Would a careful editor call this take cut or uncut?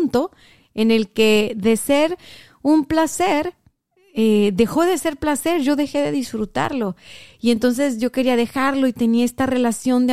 uncut